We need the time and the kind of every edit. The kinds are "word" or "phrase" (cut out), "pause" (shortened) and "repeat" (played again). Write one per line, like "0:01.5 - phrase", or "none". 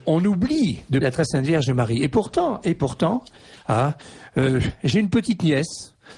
0:01.0 - word